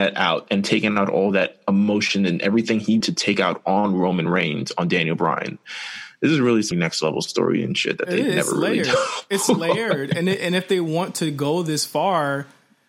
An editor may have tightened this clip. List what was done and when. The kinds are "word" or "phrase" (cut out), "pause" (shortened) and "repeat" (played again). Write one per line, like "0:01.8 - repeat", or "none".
0:03.0 - word
0:06.7 - word